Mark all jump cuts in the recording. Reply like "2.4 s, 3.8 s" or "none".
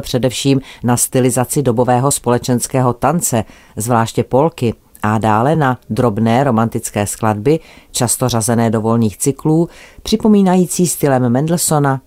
none